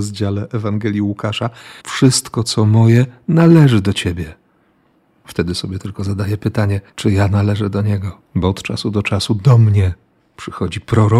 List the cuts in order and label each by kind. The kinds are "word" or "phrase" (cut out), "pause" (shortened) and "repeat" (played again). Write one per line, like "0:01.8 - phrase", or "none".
0:01.8 - pause
0:06.9 - pause
0:08.3 - pause